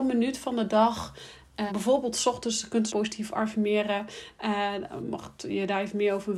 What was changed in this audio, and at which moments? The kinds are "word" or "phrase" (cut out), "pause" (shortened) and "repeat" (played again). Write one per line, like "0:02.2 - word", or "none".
0:01.7 - word
0:02.9 - phrase